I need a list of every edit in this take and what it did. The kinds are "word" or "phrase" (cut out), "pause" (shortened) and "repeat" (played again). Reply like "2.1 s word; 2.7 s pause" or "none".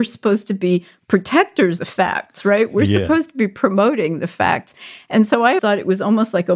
1.8 s word; 5.6 s word

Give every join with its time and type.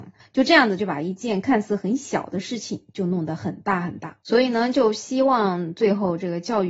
4.2 s pause

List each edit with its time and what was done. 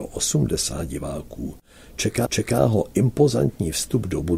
2.3 s repeat

